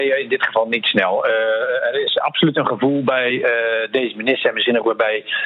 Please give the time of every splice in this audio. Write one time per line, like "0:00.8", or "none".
none